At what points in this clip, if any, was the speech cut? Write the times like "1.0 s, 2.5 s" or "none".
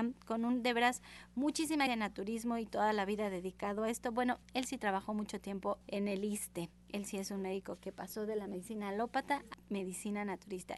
1.9 s, 4.4 s, 5.8 s, 7.8 s, 9.5 s

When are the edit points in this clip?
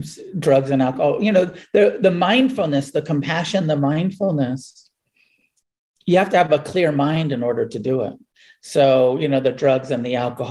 none

